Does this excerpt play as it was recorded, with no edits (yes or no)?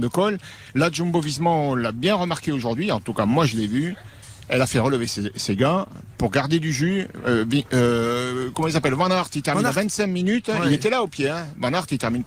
yes